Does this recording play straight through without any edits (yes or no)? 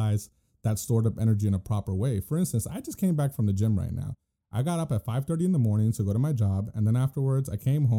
yes